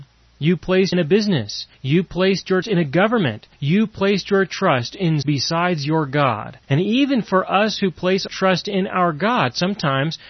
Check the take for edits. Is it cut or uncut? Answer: cut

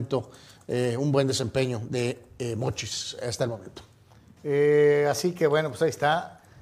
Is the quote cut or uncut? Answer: uncut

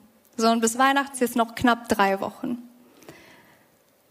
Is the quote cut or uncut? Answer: cut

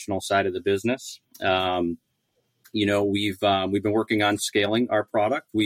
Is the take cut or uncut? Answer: uncut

